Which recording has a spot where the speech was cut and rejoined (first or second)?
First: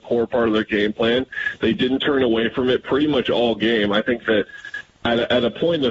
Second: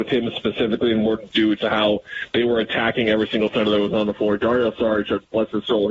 second